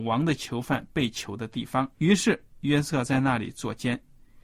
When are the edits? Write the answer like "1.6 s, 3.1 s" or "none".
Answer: 1.9 s